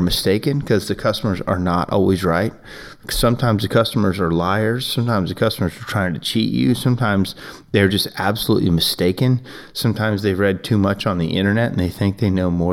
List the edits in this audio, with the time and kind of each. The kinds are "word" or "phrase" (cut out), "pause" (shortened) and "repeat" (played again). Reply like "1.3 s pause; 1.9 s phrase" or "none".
none